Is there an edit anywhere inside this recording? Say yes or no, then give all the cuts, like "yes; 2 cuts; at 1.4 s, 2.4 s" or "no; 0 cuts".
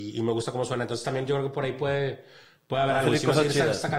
no; 0 cuts